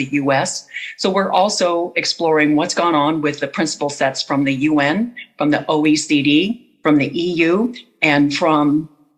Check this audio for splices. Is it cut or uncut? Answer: uncut